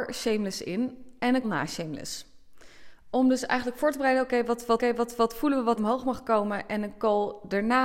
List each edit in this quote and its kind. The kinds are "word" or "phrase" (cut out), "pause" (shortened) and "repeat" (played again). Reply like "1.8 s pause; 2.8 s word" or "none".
1.4 s word; 4.8 s repeat; 5.8 s word